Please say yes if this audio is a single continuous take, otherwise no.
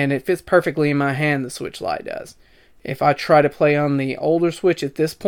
yes